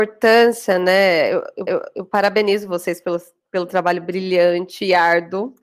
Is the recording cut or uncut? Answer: cut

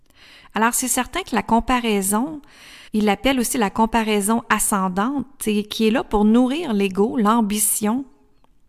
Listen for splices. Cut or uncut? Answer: cut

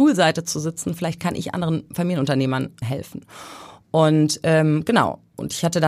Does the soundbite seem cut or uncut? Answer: cut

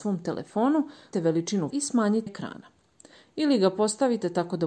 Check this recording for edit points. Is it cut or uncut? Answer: cut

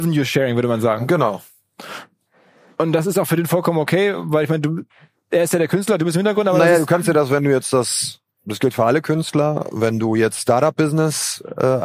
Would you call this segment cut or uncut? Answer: uncut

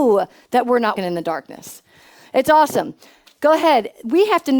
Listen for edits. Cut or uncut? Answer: cut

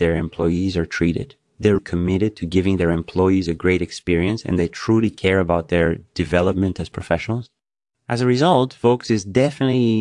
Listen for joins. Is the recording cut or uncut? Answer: cut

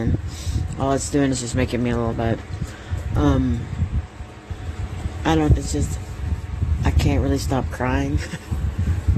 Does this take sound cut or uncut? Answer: cut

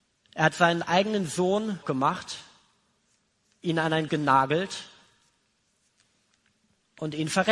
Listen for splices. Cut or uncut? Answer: cut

